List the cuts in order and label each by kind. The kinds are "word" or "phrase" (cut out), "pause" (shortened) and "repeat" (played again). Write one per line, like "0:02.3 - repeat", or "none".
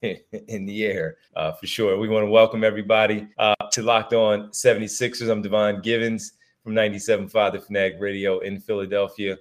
0:01.2 - pause
0:03.3 - pause

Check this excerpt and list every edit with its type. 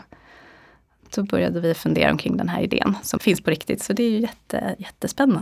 0:03.2 - word

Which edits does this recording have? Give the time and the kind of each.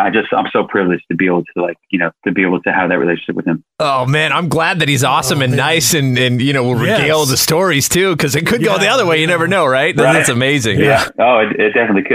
0:02.2 - pause
0:11.1 - pause

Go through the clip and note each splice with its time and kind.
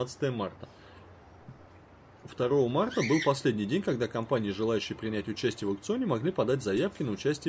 none

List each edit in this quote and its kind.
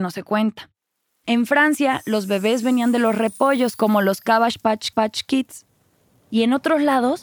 0:04.9 - repeat

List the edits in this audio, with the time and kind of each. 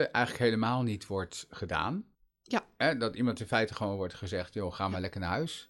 0:02.1 - pause

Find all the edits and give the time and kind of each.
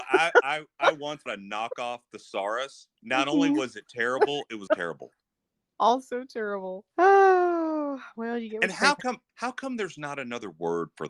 0:01.3 - word
0:03.0 - pause
0:04.7 - word
0:06.9 - pause
0:09.3 - pause

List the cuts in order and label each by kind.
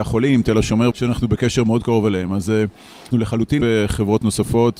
0:00.9 - word
0:03.1 - word
0:03.6 - word

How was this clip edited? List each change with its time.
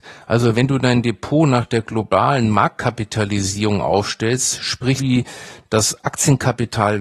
0:05.0 - word

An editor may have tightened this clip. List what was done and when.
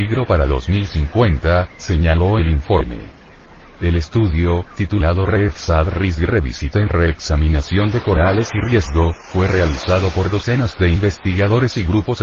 0:03.4 - pause

